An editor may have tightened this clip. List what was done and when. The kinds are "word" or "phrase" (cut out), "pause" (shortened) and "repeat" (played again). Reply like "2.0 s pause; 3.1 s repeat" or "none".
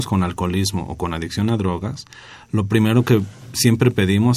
none

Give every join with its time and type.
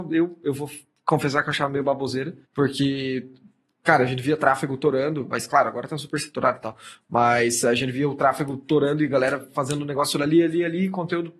2.4 s pause

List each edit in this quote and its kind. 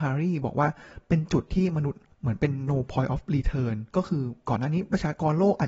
2.1 s pause; 3.9 s pause

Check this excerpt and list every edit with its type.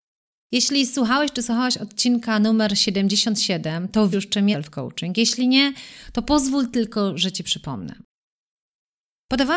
4.1 s word; 4.5 s word

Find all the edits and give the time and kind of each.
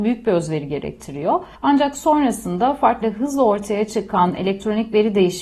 3.0 s word

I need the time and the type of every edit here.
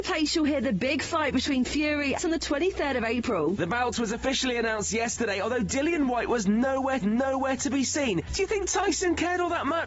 1.6 s word; 2.2 s phrase; 7.0 s repeat

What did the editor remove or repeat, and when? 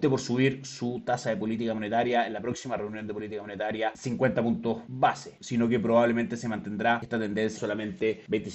7.5 s phrase

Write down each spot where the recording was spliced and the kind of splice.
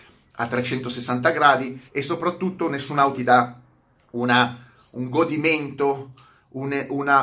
1.9 s pause; 3.1 s word

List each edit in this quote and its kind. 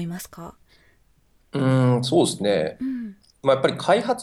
none

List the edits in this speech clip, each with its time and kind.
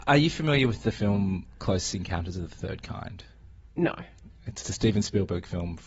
3.7 s pause; 4.6 s word

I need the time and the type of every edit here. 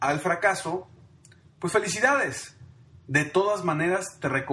none

